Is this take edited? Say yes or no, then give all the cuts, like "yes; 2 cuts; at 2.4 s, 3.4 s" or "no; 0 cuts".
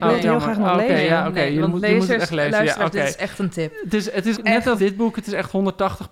yes; 2 cuts; at 4.3 s, 4.8 s